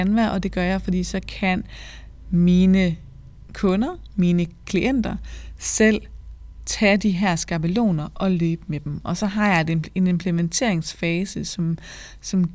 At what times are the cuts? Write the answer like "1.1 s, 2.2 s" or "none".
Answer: none